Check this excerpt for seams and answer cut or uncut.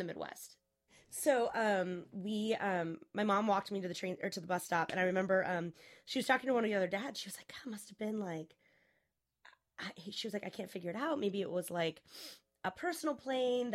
uncut